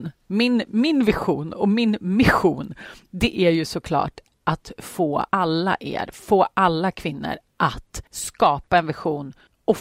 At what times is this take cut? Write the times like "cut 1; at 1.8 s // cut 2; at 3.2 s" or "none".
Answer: cut 1; at 5.3 s // cut 2; at 8.1 s